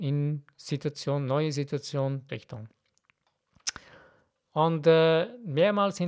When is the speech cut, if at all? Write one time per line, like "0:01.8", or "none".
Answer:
0:02.3